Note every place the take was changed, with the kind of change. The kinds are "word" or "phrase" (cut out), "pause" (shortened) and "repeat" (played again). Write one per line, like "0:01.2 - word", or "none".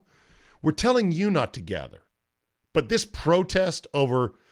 none